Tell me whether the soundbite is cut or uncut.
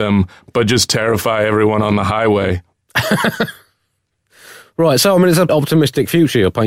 cut